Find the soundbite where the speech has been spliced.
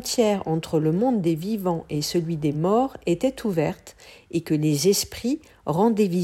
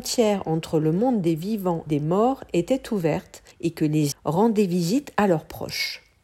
second; 3 cuts; at 1.9 s, 3.5 s, 4.1 s

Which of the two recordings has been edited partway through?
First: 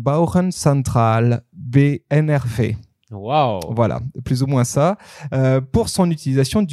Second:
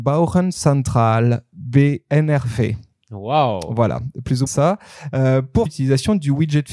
second; 2 cuts; at 4.5 s, 5.7 s

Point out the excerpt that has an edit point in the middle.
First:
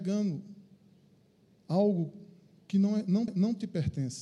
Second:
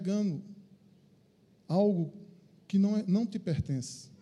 first; 1 cut; at 3.3 s

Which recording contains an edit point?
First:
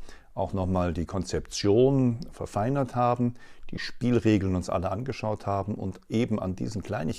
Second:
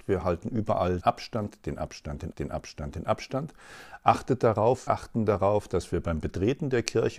second; 3 cuts; at 1.0 s, 2.3 s, 4.9 s

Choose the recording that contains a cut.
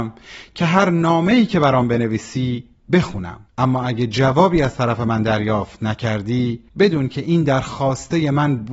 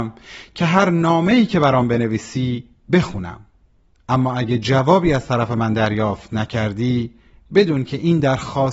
first; 2 cuts; at 3.5 s, 6.7 s

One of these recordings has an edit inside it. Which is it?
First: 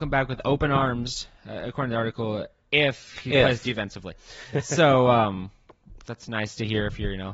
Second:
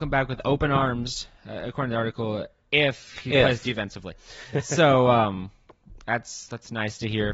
first; 1 cut; at 6.0 s

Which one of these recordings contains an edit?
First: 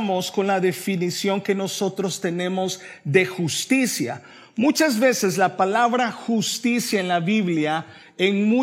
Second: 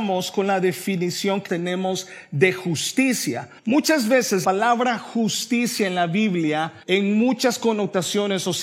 second; 4 cuts; at 1.5 s, 3.6 s, 4.4 s, 6.8 s

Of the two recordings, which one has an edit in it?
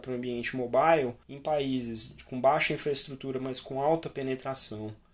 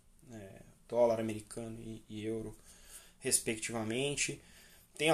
first; 1 cut; at 1.2 s

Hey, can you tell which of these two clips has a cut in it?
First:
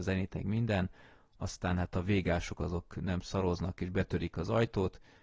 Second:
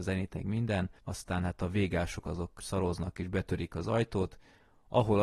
second; 2 cuts; at 1.0 s, 2.6 s

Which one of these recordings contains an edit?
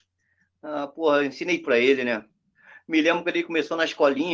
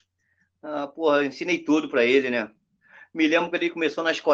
first; 1 cut; at 1.6 s

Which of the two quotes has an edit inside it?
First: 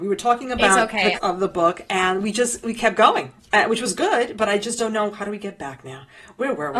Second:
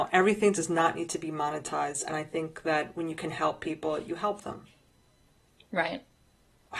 first; 1 cut; at 1.2 s

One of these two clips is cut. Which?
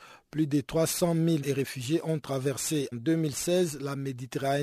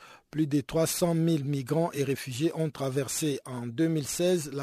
first; 2 cuts; at 1.4 s, 2.9 s

